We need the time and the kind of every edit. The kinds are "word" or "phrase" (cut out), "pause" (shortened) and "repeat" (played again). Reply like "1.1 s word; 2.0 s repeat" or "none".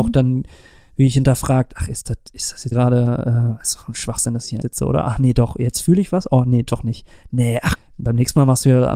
2.7 s word; 4.6 s word; 7.8 s word